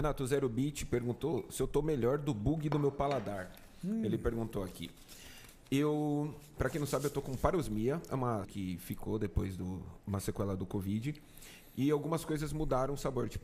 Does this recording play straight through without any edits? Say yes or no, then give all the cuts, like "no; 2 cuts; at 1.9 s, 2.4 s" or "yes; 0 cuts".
no; 1 cut; at 8.4 s